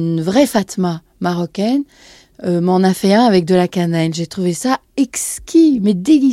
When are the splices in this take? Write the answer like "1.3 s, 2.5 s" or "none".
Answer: none